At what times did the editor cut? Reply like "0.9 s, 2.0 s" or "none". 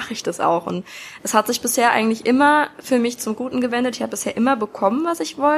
none